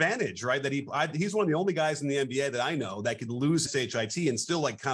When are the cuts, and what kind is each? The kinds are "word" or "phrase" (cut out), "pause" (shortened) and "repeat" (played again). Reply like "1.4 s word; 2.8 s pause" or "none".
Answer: 3.7 s word

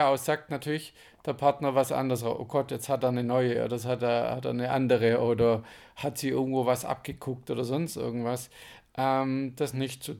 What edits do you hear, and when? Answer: none

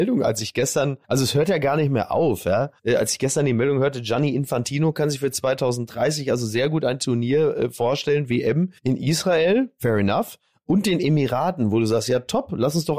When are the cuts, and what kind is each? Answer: 1.0 s pause; 2.8 s pause; 8.8 s pause

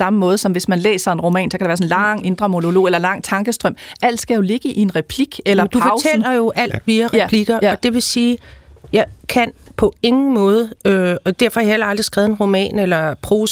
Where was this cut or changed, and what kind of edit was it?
9.2 s pause

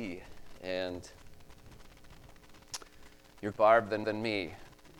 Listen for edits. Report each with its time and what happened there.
3.5 s word; 4.0 s repeat

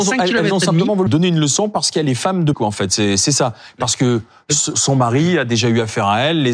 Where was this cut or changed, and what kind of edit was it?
1.1 s word; 2.5 s word; 4.7 s word

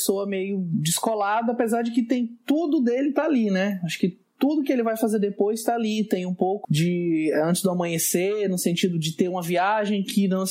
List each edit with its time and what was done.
6.6 s word

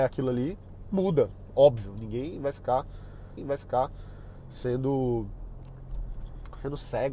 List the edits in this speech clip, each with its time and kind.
3.4 s repeat

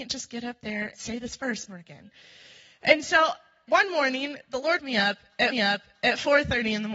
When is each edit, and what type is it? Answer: 0.9 s word; 1.7 s phrase; 3.7 s word; 4.8 s word; 5.5 s repeat

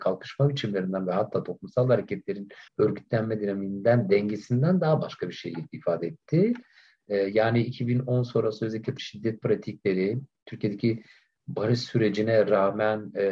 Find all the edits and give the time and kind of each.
2.7 s pause; 9.0 s word

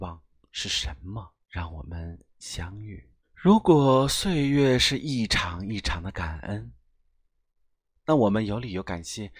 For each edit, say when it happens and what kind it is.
1.4 s pause; 3.2 s pause

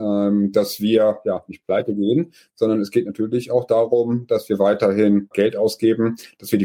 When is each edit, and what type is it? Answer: 5.3 s word

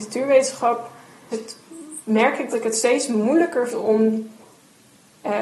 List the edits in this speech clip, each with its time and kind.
1.3 s word; 2.5 s word; 3.7 s word

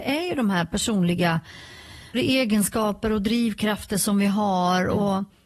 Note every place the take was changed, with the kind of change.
2.1 s word

